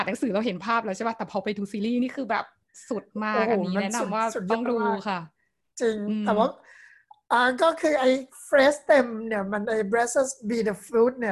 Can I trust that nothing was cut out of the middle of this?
yes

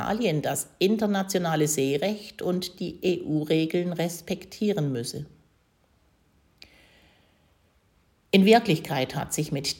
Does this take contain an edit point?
no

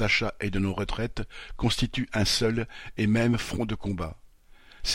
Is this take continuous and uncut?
yes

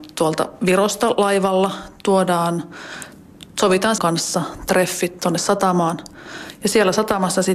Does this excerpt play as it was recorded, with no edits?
no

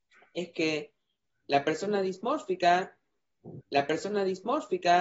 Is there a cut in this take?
yes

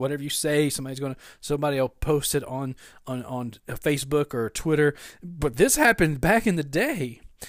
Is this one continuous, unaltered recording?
yes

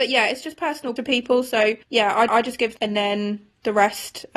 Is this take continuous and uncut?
no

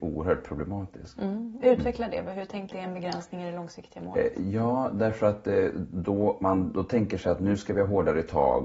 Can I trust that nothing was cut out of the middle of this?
no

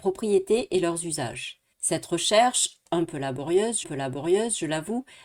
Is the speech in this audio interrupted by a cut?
yes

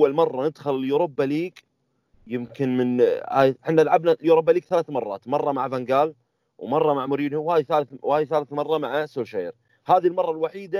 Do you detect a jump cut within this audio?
no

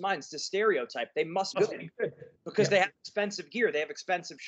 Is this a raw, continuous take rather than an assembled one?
no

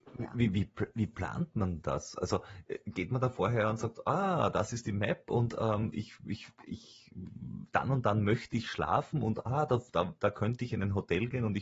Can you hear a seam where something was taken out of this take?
yes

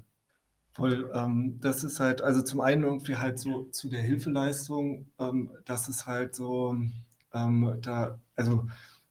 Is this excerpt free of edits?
yes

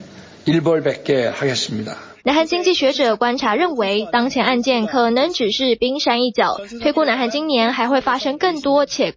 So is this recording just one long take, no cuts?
no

